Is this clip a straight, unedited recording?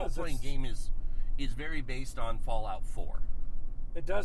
yes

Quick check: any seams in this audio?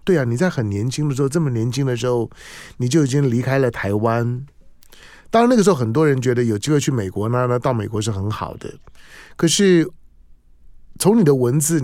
no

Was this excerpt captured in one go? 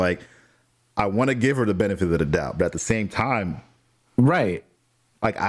yes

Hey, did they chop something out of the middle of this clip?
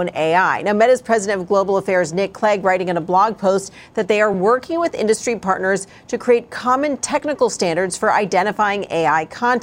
no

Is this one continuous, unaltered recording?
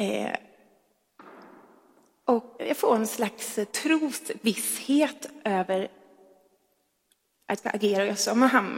no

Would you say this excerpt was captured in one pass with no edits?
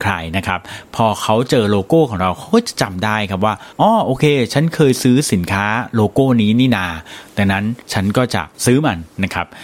no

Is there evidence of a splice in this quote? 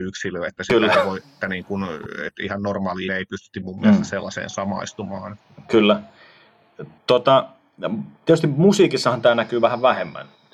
yes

